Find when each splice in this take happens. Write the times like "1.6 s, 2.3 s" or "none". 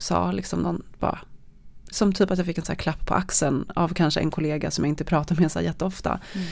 none